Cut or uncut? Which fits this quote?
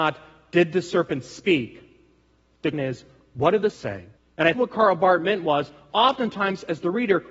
cut